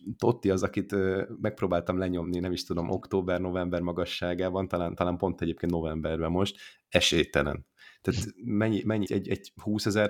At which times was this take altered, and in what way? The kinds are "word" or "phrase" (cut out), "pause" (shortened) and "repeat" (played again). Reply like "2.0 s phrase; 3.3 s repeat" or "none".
9.0 s word